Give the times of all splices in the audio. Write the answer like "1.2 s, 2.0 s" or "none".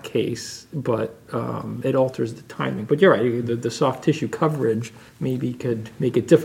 5.1 s